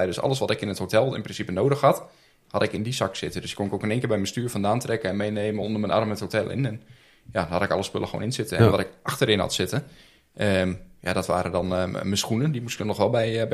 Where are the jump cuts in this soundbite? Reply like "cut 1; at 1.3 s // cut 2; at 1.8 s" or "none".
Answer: none